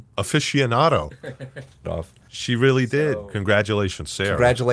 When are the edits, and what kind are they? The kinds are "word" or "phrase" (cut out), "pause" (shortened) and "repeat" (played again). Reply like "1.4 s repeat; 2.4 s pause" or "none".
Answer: 1.8 s phrase; 2.2 s pause